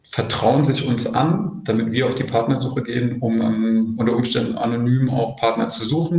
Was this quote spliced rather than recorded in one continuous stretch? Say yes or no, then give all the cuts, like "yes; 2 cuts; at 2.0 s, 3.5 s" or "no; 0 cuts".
no; 0 cuts